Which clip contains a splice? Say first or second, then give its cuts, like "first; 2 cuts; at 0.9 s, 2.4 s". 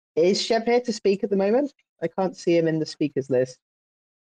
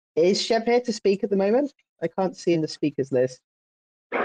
second; 1 cut; at 2.5 s